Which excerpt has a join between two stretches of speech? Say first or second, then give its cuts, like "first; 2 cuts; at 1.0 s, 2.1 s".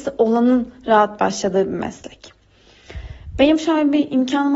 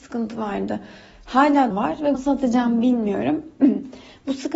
second; 2 cuts; at 1.7 s, 2.1 s